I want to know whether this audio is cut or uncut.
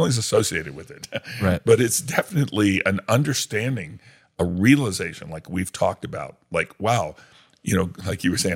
uncut